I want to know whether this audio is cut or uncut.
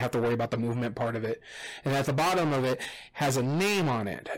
uncut